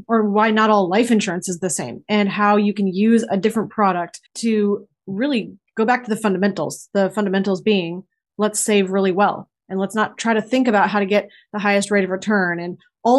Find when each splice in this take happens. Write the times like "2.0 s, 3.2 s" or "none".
4.3 s